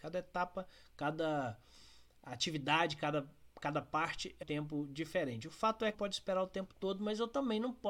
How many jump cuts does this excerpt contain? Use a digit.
2